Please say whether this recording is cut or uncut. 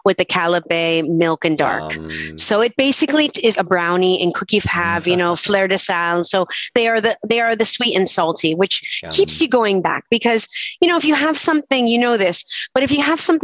cut